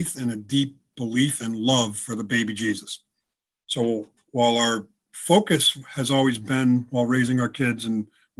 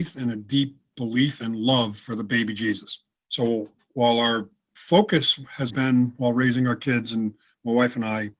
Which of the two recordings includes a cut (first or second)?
second